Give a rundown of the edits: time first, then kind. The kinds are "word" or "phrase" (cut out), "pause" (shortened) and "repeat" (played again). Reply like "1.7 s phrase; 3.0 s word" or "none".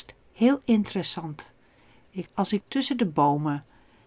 2.3 s word; 2.6 s word